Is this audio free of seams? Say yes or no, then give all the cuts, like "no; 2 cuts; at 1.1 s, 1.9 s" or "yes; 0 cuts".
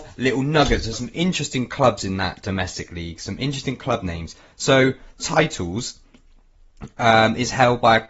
no; 2 cuts; at 0.9 s, 5.2 s